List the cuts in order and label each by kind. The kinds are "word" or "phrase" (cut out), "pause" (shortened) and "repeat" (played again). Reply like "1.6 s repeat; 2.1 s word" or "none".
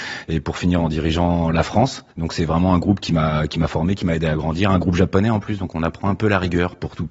2.1 s pause